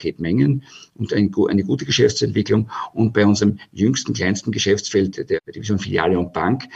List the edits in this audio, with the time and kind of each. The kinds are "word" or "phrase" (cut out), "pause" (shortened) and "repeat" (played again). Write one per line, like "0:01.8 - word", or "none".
0:05.4 - pause